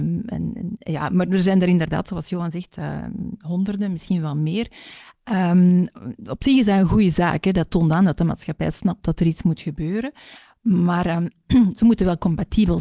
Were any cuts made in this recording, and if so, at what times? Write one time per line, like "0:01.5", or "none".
none